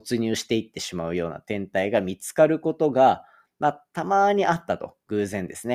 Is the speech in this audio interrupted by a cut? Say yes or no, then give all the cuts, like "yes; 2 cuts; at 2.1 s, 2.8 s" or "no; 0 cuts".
no; 0 cuts